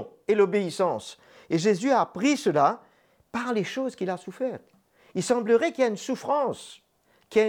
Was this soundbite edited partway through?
no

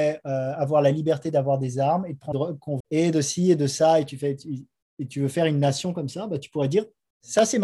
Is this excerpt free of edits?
no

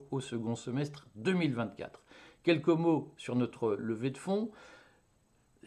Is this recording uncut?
yes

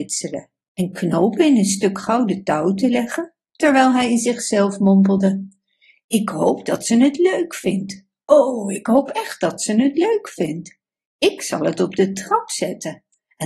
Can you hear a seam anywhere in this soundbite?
no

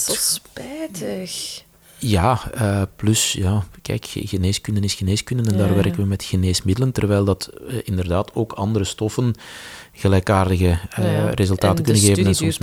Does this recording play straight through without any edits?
yes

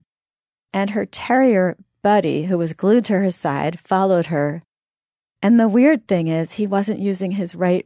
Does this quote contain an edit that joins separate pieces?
no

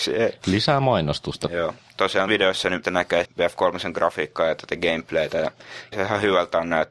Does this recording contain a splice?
yes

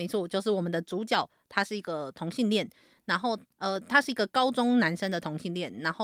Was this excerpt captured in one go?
yes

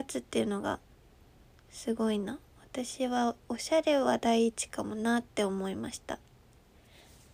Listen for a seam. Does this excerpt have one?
no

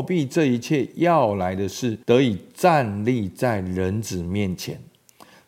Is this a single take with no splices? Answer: no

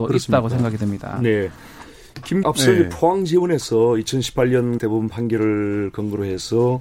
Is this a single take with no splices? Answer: no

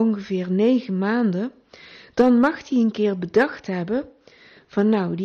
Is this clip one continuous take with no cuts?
yes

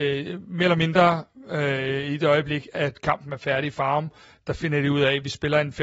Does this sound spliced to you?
no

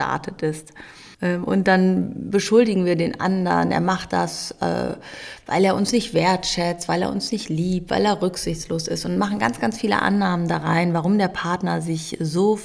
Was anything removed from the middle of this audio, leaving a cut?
yes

